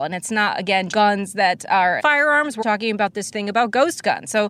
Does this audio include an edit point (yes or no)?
yes